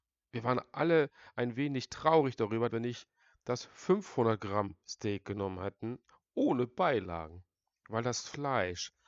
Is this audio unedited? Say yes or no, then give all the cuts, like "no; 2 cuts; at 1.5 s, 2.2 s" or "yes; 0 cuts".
no; 1 cut; at 2.7 s